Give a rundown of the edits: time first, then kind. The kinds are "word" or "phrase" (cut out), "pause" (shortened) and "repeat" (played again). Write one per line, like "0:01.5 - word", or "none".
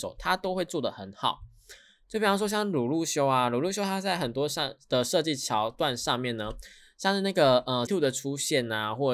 0:07.9 - word

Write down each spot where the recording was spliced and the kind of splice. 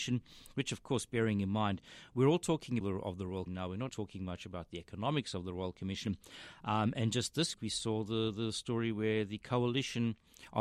0:02.8 - phrase
0:03.5 - word
0:03.9 - word
0:07.5 - word

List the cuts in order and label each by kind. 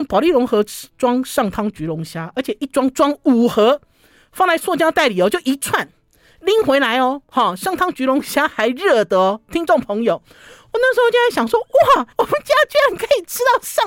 0:12.1 - pause

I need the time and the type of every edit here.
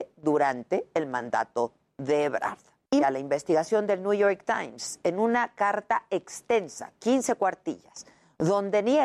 0:03.0 - phrase

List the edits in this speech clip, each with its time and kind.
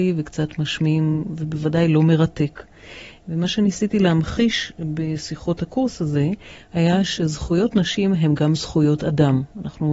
none

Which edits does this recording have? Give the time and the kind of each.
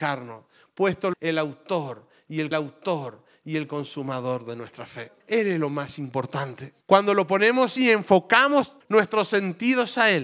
0:01.1 - phrase
0:02.5 - repeat
0:05.2 - pause
0:06.8 - pause
0:07.8 - phrase
0:08.8 - word

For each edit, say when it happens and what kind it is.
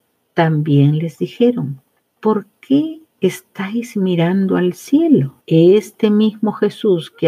0:02.0 - pause
0:03.1 - pause
0:05.4 - pause

